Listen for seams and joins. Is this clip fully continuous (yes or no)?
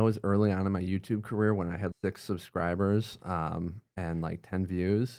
no